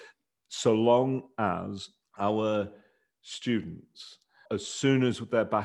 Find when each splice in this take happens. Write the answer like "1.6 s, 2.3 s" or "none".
2.0 s, 4.5 s